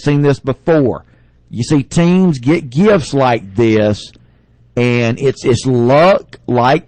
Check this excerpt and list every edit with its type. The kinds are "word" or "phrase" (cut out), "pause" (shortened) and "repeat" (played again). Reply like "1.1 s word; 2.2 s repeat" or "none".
none